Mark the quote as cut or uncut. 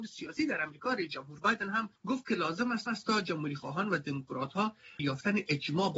cut